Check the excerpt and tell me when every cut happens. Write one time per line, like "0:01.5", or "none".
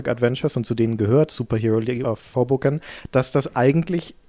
none